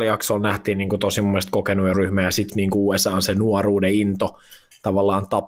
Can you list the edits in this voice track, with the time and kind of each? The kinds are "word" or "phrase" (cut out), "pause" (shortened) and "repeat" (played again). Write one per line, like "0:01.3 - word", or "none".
0:01.9 - word
0:02.5 - word